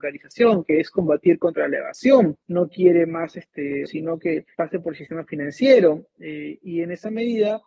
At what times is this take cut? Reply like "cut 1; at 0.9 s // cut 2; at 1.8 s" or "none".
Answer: cut 1; at 2.4 s // cut 2; at 3.9 s // cut 3; at 4.5 s